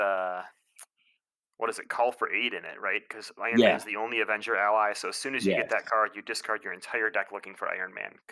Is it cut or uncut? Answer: uncut